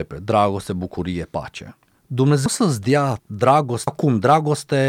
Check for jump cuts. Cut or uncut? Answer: cut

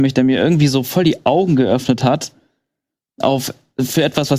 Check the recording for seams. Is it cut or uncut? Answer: uncut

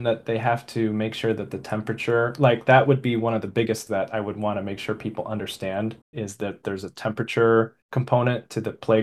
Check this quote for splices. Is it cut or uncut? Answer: cut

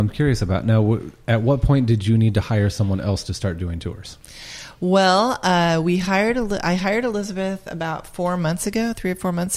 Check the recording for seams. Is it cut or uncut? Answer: uncut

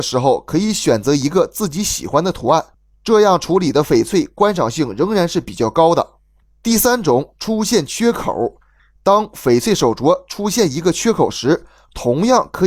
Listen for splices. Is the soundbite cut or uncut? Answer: uncut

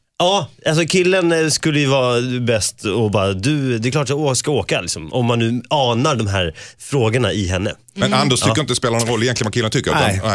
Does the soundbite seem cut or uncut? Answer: uncut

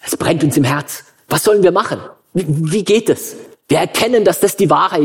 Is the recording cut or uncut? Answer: uncut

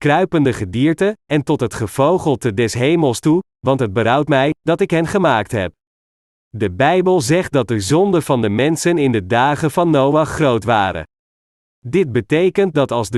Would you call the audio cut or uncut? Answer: uncut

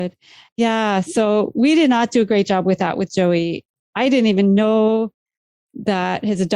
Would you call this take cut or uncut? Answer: uncut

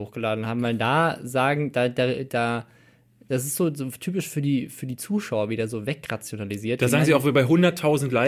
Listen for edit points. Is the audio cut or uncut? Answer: uncut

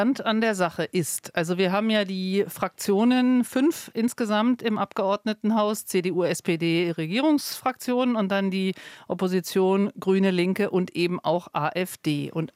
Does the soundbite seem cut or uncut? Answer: uncut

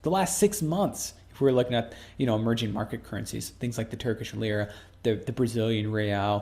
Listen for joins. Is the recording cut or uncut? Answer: uncut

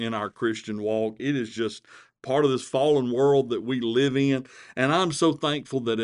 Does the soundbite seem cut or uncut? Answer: uncut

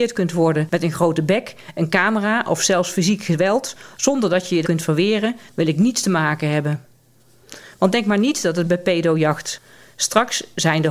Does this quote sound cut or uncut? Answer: cut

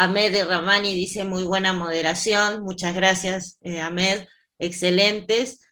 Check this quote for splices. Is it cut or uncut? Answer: uncut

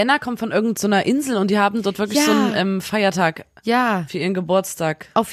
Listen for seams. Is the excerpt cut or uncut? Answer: uncut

